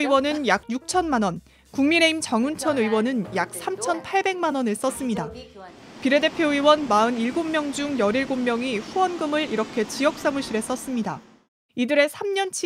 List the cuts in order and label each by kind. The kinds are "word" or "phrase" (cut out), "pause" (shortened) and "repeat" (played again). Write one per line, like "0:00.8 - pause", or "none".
none

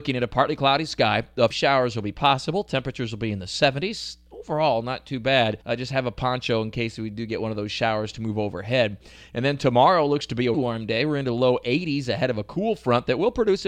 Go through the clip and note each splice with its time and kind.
0:01.5 - phrase
0:05.6 - pause
0:10.5 - word

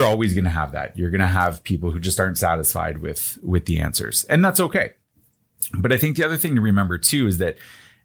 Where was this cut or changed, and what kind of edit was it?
none

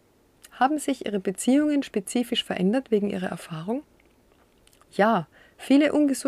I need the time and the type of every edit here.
none

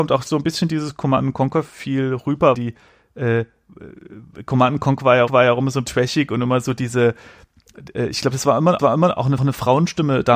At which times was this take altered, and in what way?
0:02.5 - word
0:05.3 - repeat
0:05.9 - word
0:08.8 - repeat
0:09.4 - repeat

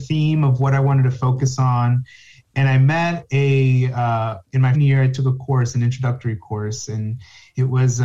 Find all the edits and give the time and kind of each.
0:04.7 - word

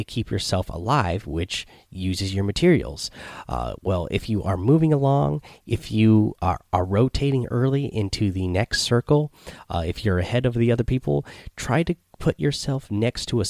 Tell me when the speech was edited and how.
none

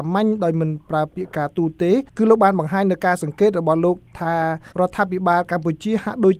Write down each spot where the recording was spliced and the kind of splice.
0:02.1 - pause
0:04.7 - pause

